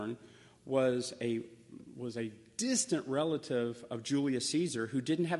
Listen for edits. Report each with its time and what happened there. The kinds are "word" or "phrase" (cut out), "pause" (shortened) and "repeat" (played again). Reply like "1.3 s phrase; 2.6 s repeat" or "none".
none

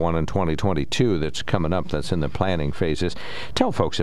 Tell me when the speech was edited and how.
none

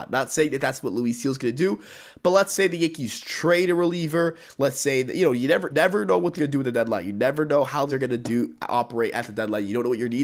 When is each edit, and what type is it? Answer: 5.7 s word; 6.4 s word; 7.9 s word

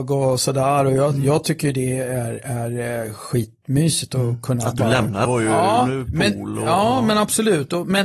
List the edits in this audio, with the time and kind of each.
5.2 s phrase

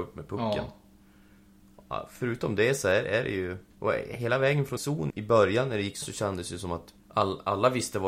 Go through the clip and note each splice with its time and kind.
3.7 s pause; 4.8 s word; 5.1 s word; 6.0 s word; 7.0 s pause

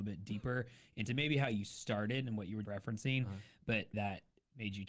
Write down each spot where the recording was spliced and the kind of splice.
2.6 s word; 3.9 s word

